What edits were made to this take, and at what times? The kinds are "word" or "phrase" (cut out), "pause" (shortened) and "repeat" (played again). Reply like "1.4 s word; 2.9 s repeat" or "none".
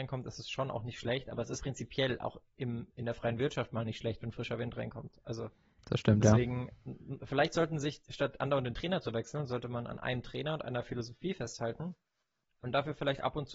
1.6 s word